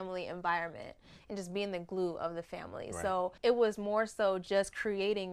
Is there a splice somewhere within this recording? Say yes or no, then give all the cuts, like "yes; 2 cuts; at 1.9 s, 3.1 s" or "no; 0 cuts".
yes; 1 cut; at 3.4 s